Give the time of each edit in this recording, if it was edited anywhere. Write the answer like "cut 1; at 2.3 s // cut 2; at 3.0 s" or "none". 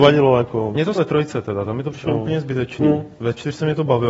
cut 1; at 0.9 s